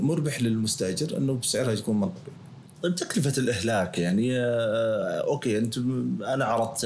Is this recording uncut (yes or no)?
no